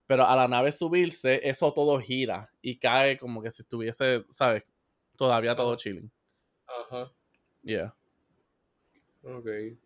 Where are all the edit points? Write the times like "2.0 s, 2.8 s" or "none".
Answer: none